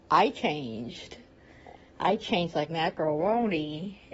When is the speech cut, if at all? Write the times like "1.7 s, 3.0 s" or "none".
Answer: 2.7 s